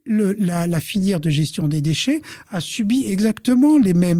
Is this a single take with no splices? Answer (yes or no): yes